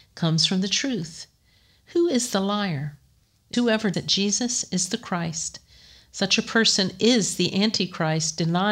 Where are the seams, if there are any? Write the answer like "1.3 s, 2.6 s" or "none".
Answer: 3.5 s, 3.9 s